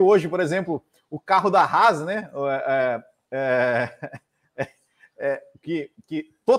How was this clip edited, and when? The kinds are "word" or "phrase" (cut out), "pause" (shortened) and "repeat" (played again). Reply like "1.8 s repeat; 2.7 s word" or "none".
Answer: none